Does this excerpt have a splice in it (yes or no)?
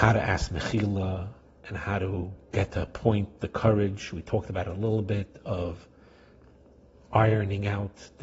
no